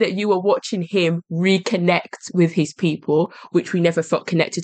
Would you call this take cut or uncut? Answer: uncut